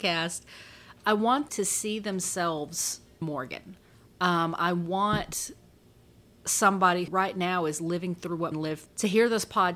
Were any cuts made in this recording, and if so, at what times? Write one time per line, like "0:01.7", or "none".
0:01.5
0:03.2
0:07.1
0:08.5
0:08.9